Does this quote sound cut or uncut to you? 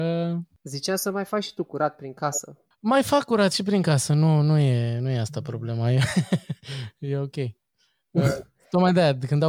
uncut